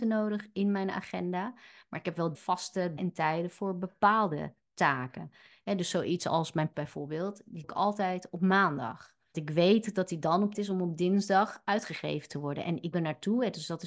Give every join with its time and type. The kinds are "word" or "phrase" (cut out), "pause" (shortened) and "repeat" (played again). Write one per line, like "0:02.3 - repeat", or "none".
0:02.3 - word
0:03.0 - word
0:06.7 - word
0:07.6 - word
0:09.3 - word
0:10.5 - word
0:12.9 - word